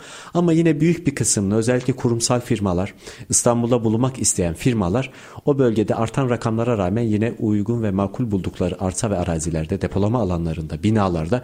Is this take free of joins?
yes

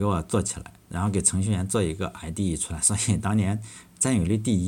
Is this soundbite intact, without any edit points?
yes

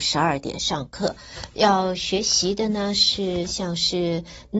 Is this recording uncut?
yes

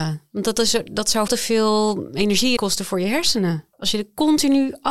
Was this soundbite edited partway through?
yes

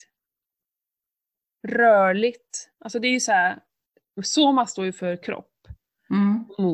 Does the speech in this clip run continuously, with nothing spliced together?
no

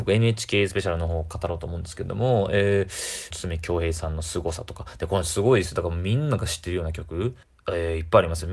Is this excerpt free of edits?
no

